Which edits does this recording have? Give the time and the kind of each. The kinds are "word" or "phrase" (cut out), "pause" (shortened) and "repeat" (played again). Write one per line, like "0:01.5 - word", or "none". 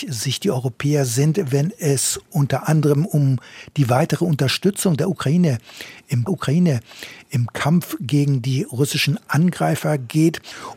0:06.3 - repeat

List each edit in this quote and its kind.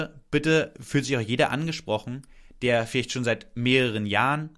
none

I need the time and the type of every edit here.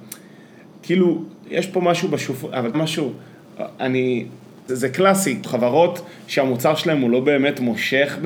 0:01.4 - word
0:02.7 - word
0:04.7 - word
0:05.4 - word

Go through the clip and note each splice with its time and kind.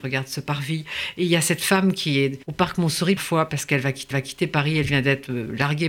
0:02.4 - pause
0:03.2 - phrase
0:04.1 - repeat

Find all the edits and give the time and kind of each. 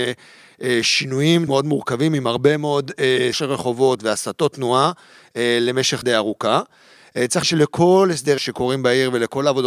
0:01.5 - word
0:03.3 - word
0:06.0 - word
0:07.4 - word
0:08.4 - word

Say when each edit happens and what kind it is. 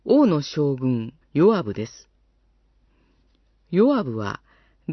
0:01.2 - pause

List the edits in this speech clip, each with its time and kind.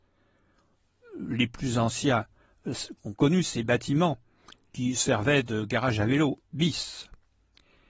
0:03.0 - pause

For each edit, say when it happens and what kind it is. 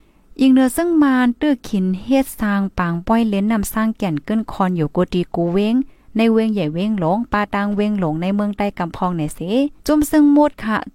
0:09.8 - pause

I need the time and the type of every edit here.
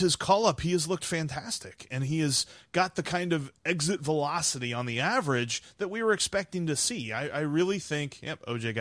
none

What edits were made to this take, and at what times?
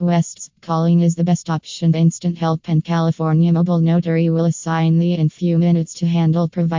0:01.9 - word
0:05.2 - word

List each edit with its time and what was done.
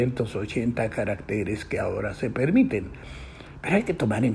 none

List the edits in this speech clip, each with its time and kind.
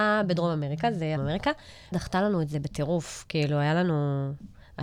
0:01.2 - phrase
0:01.9 - word

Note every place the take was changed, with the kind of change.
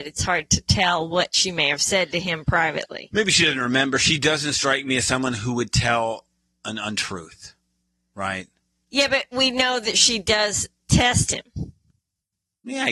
none

